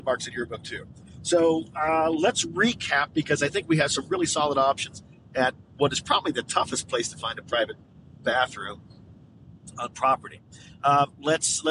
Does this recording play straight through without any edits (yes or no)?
yes